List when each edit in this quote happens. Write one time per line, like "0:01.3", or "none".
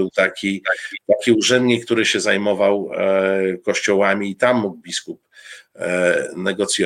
none